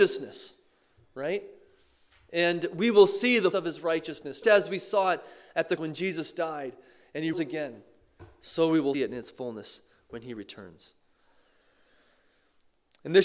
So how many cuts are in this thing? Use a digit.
5